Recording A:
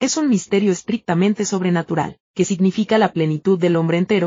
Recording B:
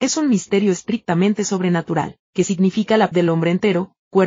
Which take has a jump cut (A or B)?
B